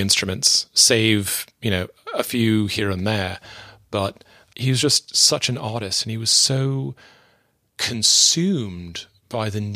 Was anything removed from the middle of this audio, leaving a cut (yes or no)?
no